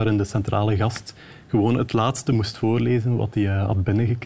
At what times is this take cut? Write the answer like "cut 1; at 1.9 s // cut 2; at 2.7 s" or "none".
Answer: none